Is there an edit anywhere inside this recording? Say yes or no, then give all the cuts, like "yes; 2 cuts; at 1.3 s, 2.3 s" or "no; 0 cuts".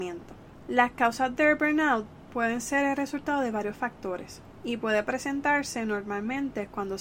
no; 0 cuts